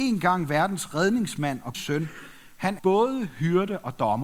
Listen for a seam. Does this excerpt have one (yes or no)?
yes